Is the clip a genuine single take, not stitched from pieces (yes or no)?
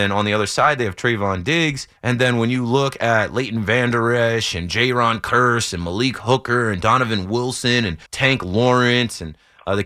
no